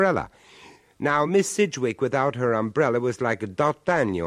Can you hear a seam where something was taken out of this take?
no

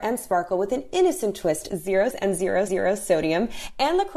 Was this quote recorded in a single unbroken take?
no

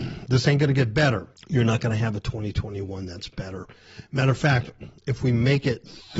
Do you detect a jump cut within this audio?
yes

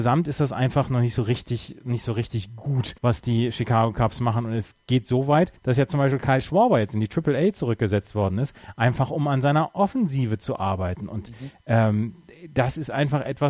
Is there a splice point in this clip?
yes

